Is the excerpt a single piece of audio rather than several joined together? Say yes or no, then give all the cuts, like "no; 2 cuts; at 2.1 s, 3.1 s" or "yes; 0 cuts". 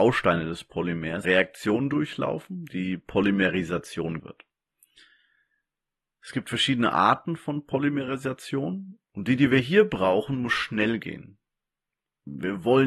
no; 2 cuts; at 1.2 s, 4.2 s